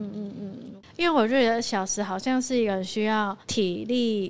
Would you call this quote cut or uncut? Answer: cut